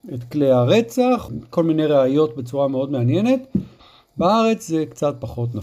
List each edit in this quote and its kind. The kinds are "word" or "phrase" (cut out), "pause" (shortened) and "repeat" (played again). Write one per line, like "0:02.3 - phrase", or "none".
0:01.3 - phrase